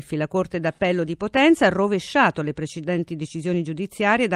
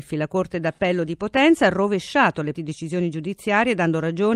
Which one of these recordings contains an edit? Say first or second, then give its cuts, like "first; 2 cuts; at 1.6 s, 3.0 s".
second; 1 cut; at 2.5 s